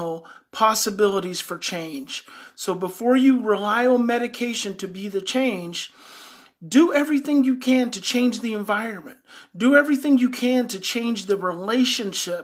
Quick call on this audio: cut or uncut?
uncut